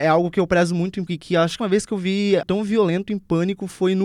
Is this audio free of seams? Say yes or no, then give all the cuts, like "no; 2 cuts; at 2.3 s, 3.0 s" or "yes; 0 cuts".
no; 3 cuts; at 1.1 s, 1.6 s, 2.4 s